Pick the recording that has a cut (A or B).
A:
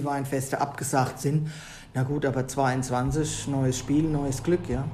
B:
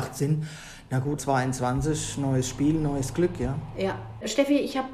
B